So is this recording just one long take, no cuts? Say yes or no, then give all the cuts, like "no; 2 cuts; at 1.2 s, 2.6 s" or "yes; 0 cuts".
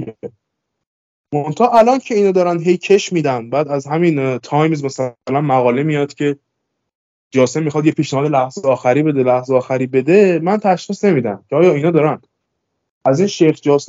yes; 0 cuts